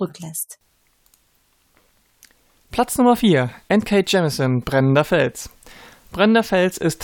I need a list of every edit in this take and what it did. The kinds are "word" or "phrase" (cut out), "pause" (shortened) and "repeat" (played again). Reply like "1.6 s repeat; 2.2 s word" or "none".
none